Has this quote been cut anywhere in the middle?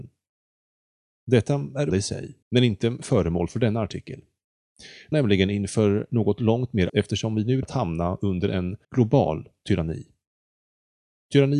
yes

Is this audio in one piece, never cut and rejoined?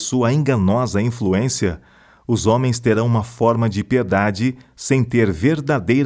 yes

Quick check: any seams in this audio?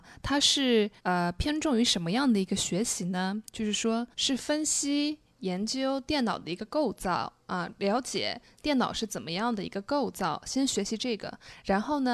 yes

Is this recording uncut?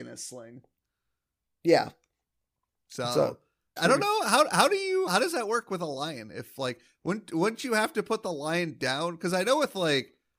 no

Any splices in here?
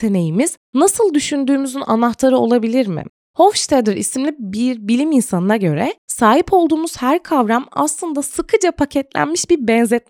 no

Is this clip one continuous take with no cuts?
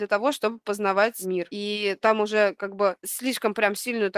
yes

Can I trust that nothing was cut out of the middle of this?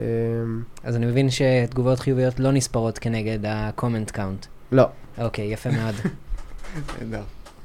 yes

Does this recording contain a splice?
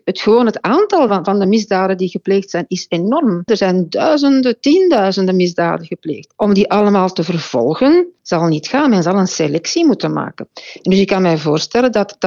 no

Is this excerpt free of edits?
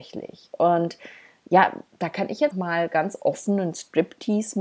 no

